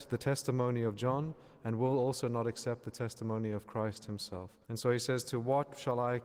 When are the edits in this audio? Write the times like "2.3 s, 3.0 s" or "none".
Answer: 4.6 s